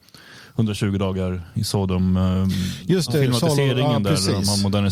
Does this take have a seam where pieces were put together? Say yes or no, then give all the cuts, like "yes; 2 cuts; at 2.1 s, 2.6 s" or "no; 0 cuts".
no; 0 cuts